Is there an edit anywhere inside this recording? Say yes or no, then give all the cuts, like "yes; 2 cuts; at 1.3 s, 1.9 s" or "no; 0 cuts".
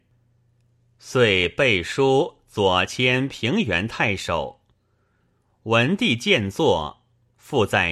no; 0 cuts